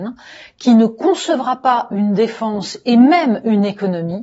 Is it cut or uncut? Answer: uncut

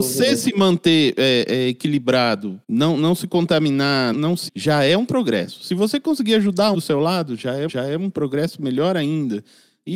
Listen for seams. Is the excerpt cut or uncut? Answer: cut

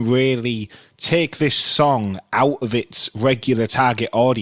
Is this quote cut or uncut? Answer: uncut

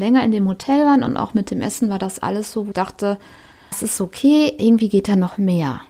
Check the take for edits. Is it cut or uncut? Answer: cut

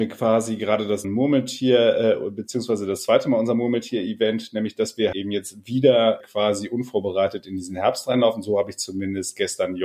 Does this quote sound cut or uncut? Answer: cut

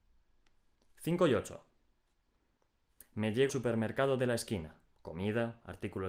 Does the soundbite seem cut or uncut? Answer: cut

